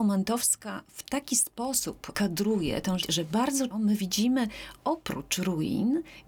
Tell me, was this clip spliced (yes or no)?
yes